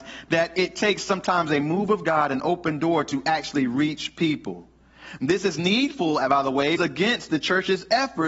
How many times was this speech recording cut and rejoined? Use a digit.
1